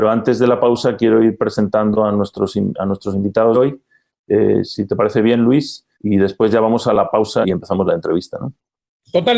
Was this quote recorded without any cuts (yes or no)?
no